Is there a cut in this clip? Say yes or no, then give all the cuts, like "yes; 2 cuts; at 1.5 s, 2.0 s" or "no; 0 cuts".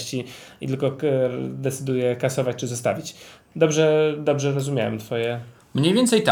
no; 0 cuts